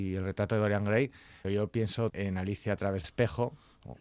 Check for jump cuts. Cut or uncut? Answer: cut